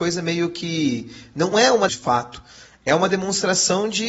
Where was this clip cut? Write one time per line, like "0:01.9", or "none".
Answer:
0:01.5
0:01.9